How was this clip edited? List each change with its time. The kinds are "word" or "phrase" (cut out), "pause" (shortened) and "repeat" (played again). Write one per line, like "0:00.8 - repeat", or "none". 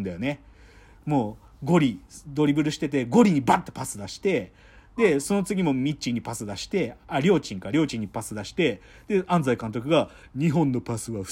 none

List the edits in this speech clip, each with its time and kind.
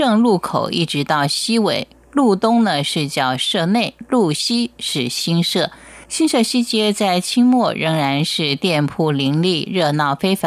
0:06.0 - pause

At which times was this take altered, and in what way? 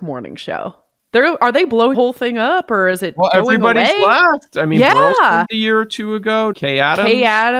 0:01.9 - word
0:05.4 - word
0:06.5 - word

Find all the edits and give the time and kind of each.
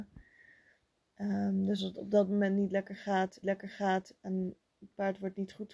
0:01.8 - word
0:03.4 - repeat

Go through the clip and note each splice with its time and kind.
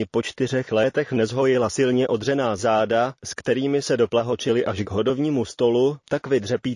none

